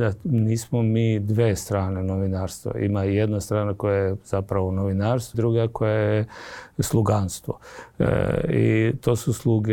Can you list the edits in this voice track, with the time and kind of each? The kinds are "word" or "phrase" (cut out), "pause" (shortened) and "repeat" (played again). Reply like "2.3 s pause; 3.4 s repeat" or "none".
5.3 s word